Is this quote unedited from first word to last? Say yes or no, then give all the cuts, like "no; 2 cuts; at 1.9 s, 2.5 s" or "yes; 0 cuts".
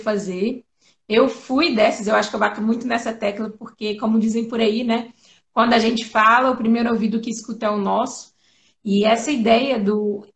yes; 0 cuts